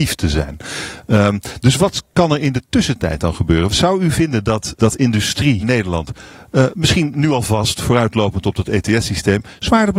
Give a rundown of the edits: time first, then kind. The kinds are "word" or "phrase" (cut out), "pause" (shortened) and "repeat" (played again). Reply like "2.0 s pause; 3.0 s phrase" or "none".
4.8 s word; 5.6 s phrase